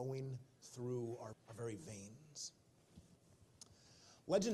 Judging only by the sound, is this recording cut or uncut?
cut